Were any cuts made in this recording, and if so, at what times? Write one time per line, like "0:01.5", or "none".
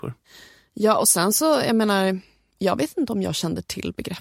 none